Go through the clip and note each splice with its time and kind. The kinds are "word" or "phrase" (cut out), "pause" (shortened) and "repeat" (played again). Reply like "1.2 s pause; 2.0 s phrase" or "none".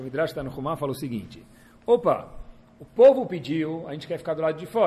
none